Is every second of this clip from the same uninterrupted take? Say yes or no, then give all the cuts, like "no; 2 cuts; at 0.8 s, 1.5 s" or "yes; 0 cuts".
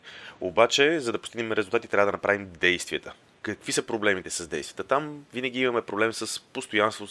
yes; 0 cuts